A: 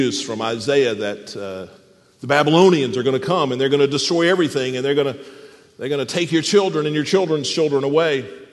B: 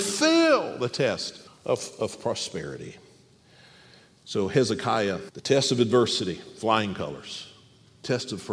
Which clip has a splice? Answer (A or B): B